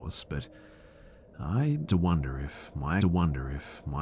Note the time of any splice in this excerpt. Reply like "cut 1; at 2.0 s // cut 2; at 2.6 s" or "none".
cut 1; at 1.9 s // cut 2; at 3.0 s

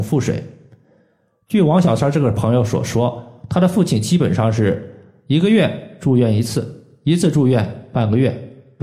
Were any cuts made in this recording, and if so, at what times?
none

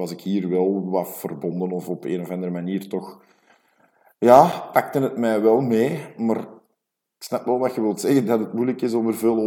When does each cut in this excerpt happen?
none

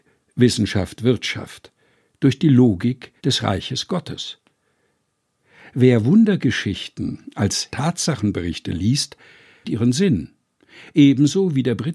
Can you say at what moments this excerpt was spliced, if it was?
cut 1; at 3.2 s // cut 2; at 7.7 s // cut 3; at 9.6 s

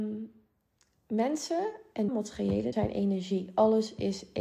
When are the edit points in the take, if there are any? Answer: cut 1; at 2.1 s // cut 2; at 2.7 s

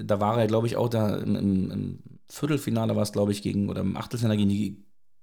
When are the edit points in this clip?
none

